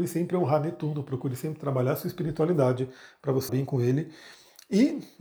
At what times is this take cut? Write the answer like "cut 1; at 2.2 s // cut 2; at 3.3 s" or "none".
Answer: cut 1; at 3.5 s